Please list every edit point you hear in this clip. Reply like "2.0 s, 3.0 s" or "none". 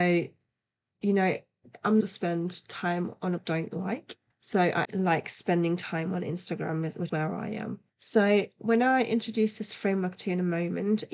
2.0 s, 3.4 s, 4.3 s, 4.8 s, 7.1 s, 7.9 s